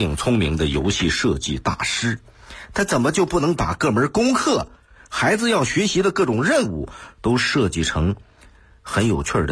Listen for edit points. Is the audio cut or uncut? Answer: uncut